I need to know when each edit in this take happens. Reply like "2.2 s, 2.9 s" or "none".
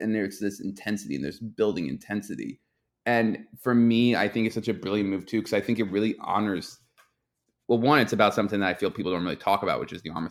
none